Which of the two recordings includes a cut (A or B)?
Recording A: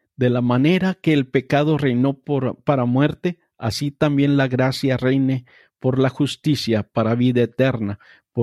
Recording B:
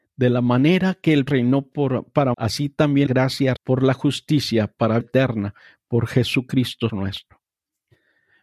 B